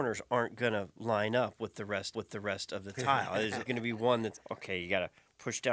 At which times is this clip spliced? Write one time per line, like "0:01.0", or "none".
0:02.1
0:03.7
0:04.3

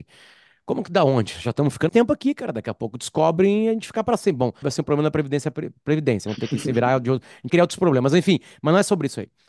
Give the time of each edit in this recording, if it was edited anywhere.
0:01.9
0:04.6
0:06.3
0:07.5

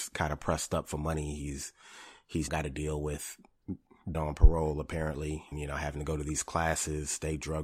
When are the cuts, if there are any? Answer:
0:02.5
0:04.1
0:05.5

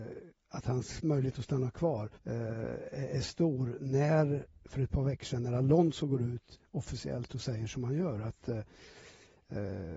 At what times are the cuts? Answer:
0:02.2

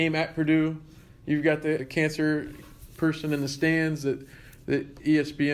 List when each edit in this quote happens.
0:01.8

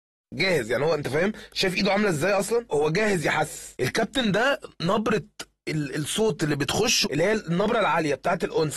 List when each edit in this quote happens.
0:02.7
0:07.0

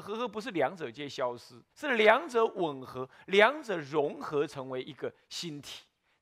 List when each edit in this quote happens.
0:01.7

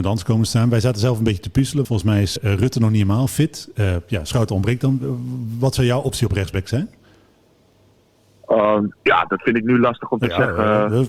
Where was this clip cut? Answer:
0:01.8
0:02.4
0:09.0

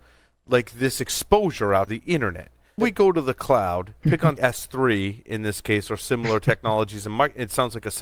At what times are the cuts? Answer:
0:01.9
0:02.8
0:04.0
0:04.4

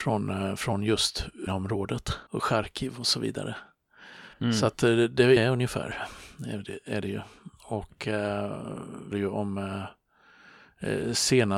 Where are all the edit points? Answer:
0:01.5
0:02.3
0:04.3
0:05.4
0:09.1

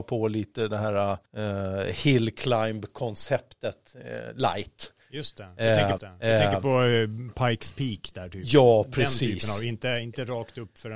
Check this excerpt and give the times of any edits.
0:01.3
0:06.0

